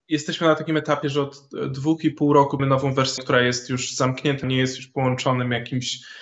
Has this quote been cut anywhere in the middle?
yes; 3 cuts; at 2.6 s, 3.2 s, 4.4 s

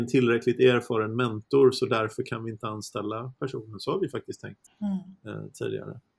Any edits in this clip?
yes; 1 cut; at 4.7 s

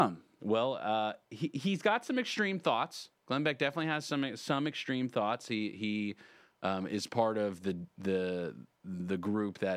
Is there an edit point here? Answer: no; 0 cuts

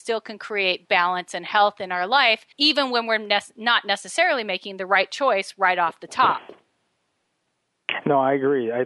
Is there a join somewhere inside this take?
yes; 1 cut; at 2.5 s

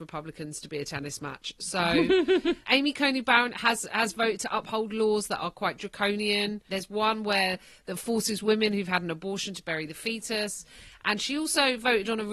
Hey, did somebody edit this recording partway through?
no; 0 cuts

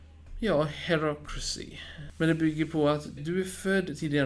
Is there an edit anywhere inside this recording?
yes; 1 cut; at 3.2 s

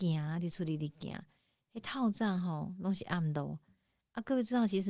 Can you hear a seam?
no; 0 cuts

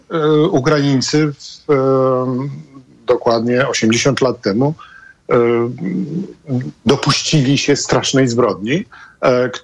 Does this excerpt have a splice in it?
no; 0 cuts

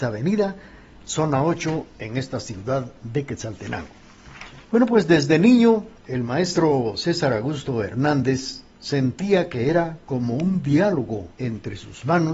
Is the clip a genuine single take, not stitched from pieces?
no; 3 cuts; at 4.6 s, 6.0 s, 11.3 s

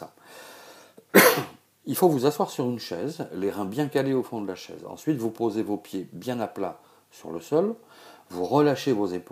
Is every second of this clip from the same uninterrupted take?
yes; 0 cuts

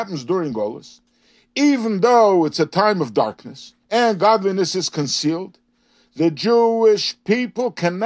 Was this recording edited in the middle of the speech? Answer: yes; 1 cut; at 3.8 s

